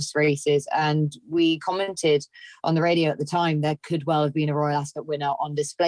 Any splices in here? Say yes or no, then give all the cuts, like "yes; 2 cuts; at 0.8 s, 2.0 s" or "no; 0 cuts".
no; 0 cuts